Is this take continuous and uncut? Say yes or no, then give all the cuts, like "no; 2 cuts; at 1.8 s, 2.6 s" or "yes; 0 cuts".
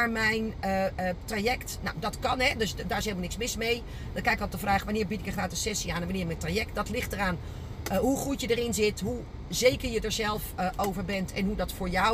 yes; 0 cuts